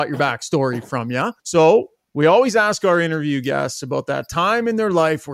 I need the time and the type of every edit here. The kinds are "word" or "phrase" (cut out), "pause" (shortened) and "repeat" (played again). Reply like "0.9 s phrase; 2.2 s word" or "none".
1.4 s pause

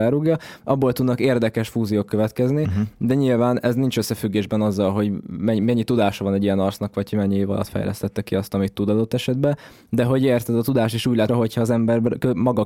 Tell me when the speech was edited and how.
11.3 s word

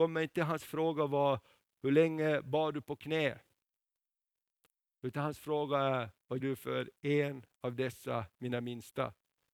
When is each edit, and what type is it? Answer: 6.4 s word

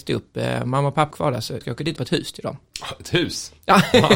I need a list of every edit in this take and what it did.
1.1 s word; 1.6 s word; 2.0 s word

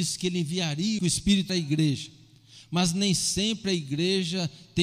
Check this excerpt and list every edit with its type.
1.0 s phrase; 1.5 s phrase

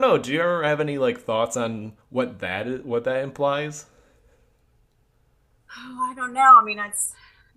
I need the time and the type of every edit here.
2.0 s pause

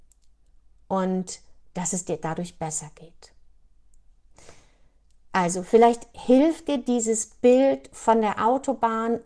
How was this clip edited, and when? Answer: none

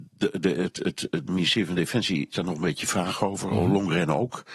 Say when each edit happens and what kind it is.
2.3 s word

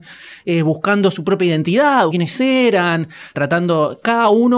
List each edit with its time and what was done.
2.1 s word

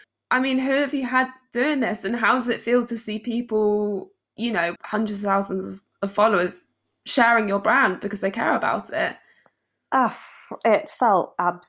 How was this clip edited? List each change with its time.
4.2 s word; 4.8 s word

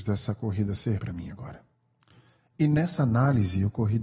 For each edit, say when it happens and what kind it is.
1.0 s word; 2.0 s pause

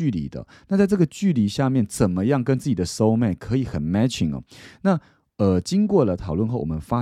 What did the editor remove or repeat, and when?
none

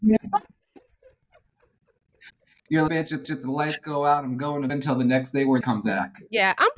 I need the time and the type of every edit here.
2.9 s word; 3.2 s repeat; 4.7 s word; 5.6 s phrase

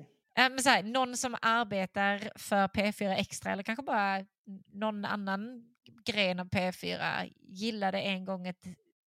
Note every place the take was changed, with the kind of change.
none

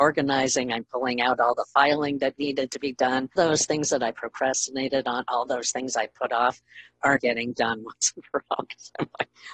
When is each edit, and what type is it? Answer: 3.4 s word; 7.2 s word

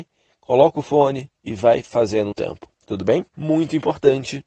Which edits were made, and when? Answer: 1.4 s pause; 2.3 s phrase; 2.7 s pause; 3.3 s pause

